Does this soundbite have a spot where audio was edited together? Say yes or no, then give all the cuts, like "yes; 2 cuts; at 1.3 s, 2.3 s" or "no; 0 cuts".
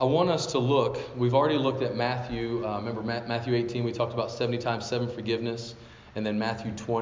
no; 0 cuts